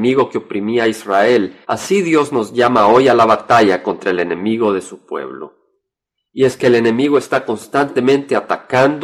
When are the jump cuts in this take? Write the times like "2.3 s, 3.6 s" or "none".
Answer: 1.6 s